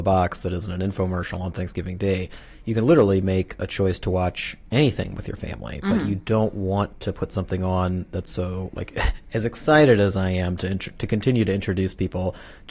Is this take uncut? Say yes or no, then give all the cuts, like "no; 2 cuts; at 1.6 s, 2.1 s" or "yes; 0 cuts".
yes; 0 cuts